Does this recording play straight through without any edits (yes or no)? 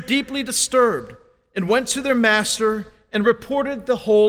yes